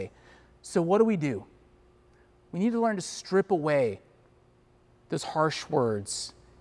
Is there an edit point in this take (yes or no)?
no